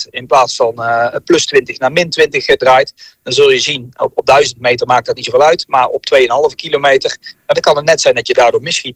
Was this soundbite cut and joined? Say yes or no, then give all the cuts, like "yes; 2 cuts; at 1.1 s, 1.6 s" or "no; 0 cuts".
no; 0 cuts